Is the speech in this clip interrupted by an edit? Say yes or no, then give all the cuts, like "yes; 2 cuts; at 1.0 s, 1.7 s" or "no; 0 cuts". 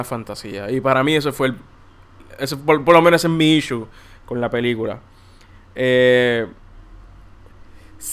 no; 0 cuts